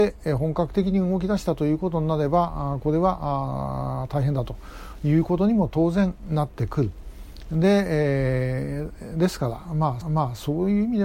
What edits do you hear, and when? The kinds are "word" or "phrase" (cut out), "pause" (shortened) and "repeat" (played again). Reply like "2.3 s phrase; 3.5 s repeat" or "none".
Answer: 10.0 s repeat